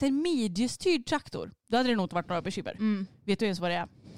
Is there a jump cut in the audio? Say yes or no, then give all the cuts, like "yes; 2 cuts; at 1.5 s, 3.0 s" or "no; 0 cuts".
no; 0 cuts